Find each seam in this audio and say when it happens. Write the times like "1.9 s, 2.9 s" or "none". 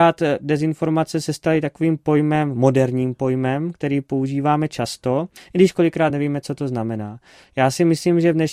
none